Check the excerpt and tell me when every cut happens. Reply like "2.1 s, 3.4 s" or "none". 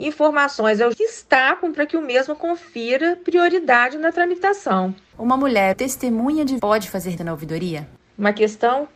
0.9 s, 1.7 s, 5.7 s, 6.6 s, 7.2 s